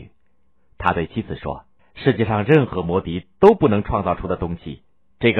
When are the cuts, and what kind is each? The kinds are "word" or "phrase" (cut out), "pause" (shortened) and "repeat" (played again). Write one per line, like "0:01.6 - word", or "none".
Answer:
0:01.8 - pause